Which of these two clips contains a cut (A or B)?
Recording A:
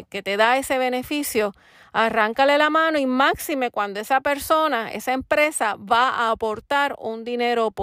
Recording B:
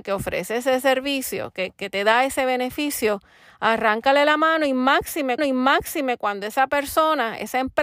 B